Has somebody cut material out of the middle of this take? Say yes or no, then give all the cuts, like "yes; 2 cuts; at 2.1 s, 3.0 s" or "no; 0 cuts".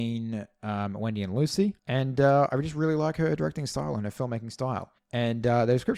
yes; 2 cuts; at 1.8 s, 5.0 s